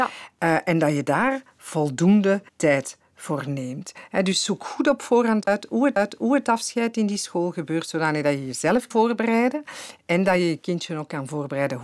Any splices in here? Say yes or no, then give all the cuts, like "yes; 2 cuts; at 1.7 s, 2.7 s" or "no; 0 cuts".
yes; 3 cuts; at 2.5 s, 5.9 s, 8.9 s